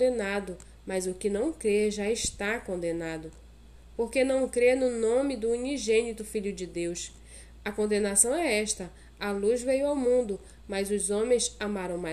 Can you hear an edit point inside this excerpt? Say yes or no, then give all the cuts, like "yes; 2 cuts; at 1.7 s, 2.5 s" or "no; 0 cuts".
no; 0 cuts